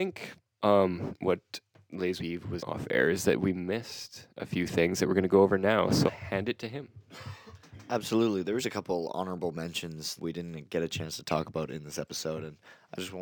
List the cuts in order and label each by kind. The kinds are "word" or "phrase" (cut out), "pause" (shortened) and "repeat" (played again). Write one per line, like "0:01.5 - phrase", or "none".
0:02.2 - word
0:02.6 - word
0:06.1 - word
0:08.6 - word
0:10.2 - word